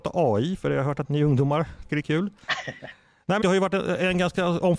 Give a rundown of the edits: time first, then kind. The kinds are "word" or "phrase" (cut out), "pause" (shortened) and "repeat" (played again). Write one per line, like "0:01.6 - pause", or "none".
0:01.0 - word
0:01.9 - word
0:03.4 - word